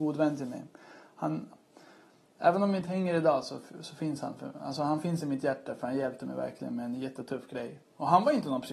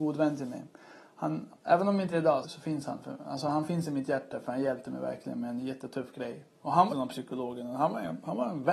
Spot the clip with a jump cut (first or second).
second